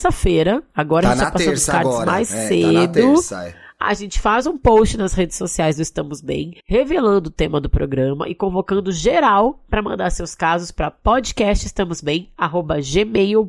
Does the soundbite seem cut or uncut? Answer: cut